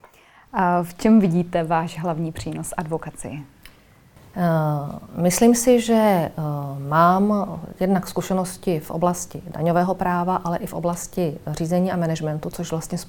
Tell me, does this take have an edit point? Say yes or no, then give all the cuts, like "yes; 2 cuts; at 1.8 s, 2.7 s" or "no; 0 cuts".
no; 0 cuts